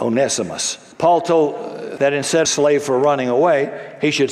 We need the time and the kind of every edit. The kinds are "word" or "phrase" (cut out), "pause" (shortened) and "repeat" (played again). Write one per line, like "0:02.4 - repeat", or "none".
0:00.9 - pause
0:02.0 - word
0:02.4 - phrase